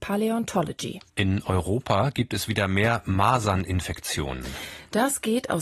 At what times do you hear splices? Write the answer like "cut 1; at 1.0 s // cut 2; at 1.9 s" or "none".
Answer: cut 1; at 1.1 s

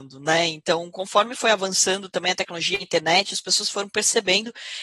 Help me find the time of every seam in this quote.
cut 1; at 2.8 s

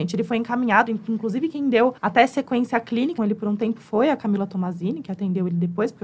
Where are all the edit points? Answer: cut 1; at 2.0 s // cut 2; at 3.2 s

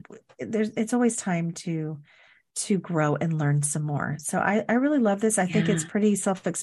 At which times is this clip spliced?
none

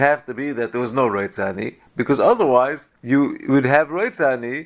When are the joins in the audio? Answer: cut 1; at 3.0 s

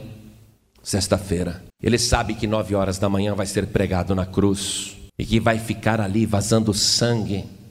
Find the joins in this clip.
cut 1; at 1.7 s // cut 2; at 5.1 s

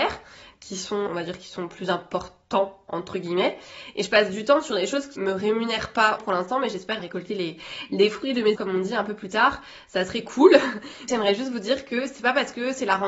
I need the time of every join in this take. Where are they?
cut 1; at 1.1 s // cut 2; at 5.2 s // cut 3; at 6.2 s // cut 4; at 7.0 s // cut 5; at 8.6 s // cut 6; at 11.1 s

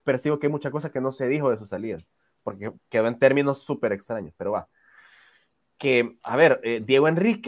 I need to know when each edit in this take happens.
cut 1; at 2.8 s // cut 2; at 6.2 s

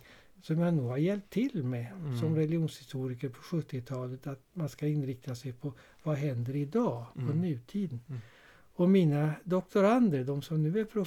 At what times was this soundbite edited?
none

